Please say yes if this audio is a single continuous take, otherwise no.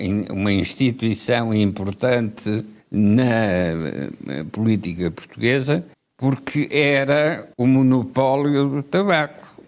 no